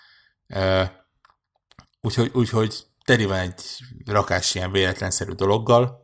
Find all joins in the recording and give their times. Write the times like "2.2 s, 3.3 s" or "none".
none